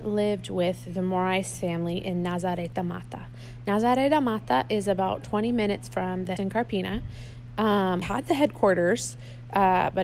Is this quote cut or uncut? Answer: cut